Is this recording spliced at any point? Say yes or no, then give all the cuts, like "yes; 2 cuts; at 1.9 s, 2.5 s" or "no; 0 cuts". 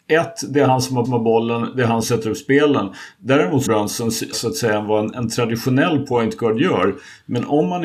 yes; 5 cuts; at 1.0 s, 2.0 s, 3.7 s, 4.3 s, 5.1 s